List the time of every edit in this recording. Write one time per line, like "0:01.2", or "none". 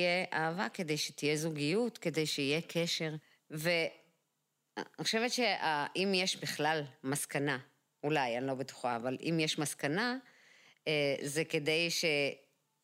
none